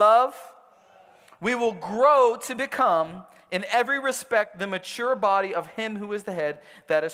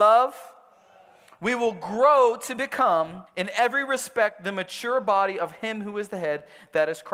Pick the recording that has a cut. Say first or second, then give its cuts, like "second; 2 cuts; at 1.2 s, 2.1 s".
second; 1 cut; at 3.3 s